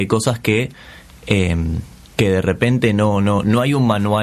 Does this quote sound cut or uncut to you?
uncut